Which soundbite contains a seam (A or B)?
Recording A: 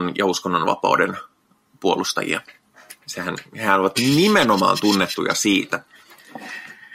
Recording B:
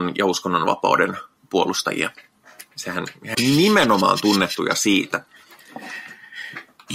B